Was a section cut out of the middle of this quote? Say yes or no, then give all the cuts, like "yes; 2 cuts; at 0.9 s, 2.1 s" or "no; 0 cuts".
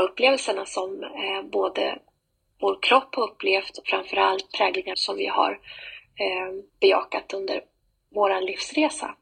yes; 3 cuts; at 3.8 s, 4.9 s, 6.7 s